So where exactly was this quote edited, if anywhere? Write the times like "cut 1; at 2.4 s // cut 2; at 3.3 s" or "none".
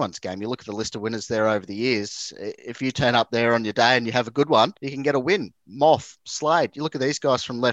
cut 1; at 2.6 s // cut 2; at 4.8 s